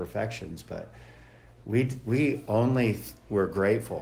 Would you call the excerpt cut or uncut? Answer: uncut